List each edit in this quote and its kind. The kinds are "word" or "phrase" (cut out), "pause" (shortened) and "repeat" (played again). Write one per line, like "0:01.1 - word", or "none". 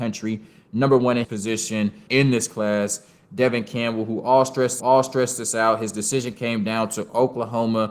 0:01.2 - word
0:02.1 - phrase
0:04.8 - repeat